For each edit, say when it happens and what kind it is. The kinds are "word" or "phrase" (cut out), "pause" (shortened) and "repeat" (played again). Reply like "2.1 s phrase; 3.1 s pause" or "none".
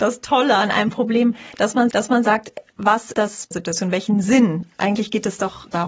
1.9 s repeat; 3.1 s word; 3.5 s phrase